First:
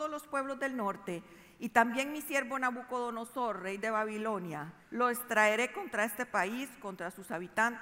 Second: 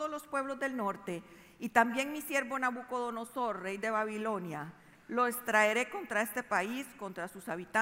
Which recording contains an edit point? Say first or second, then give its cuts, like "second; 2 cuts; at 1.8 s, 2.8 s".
first; 1 cut; at 4.8 s